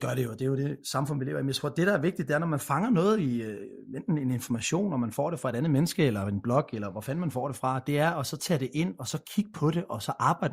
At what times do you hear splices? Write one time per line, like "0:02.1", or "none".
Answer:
none